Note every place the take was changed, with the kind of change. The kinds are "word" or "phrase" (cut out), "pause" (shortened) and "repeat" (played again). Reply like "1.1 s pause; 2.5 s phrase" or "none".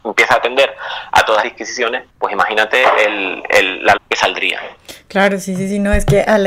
1.4 s word; 2.1 s pause; 4.0 s word